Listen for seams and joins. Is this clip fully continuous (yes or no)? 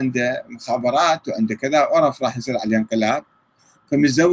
yes